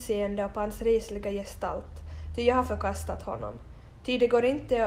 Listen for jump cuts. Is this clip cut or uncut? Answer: uncut